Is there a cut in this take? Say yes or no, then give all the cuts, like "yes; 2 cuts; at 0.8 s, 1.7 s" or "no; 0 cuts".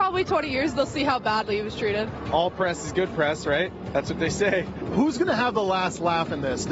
no; 0 cuts